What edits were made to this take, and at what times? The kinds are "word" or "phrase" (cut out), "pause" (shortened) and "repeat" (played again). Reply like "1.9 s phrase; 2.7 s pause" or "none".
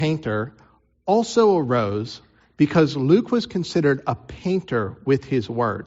none